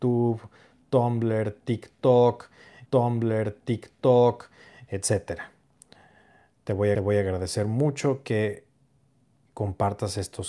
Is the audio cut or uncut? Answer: cut